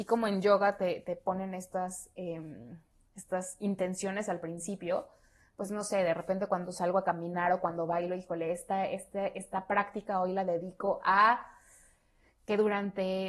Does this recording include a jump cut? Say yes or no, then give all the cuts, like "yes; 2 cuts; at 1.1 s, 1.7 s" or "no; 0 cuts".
no; 0 cuts